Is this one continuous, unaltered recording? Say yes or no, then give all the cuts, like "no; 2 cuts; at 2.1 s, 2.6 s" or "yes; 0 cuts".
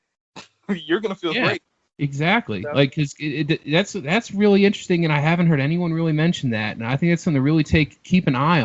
no; 1 cut; at 1.8 s